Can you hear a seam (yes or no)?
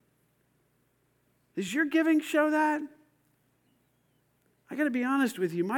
no